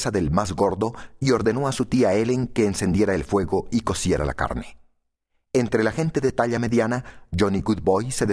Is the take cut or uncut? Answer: uncut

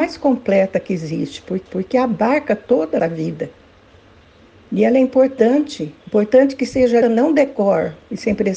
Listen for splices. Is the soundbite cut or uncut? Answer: cut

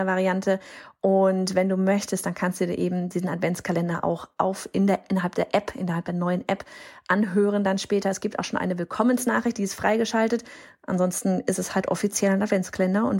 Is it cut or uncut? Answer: uncut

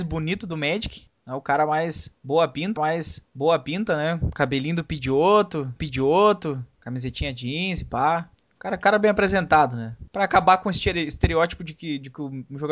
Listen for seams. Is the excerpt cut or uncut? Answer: cut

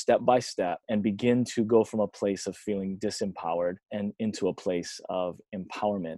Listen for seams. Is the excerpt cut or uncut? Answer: uncut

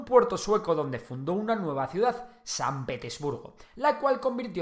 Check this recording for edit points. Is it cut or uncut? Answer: uncut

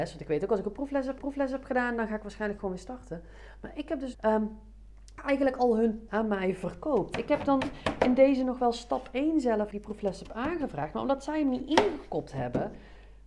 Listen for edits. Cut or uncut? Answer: cut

